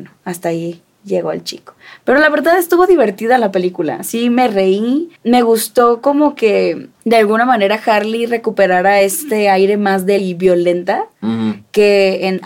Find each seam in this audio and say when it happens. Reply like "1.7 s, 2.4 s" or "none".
5.2 s, 6.9 s, 10.2 s